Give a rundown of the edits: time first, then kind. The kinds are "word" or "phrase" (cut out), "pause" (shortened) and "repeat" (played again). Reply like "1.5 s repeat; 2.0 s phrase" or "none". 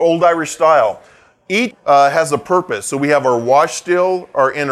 1.7 s word